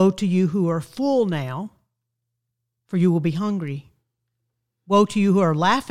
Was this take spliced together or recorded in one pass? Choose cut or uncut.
uncut